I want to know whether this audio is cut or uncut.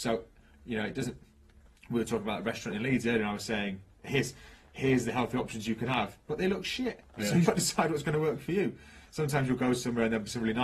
cut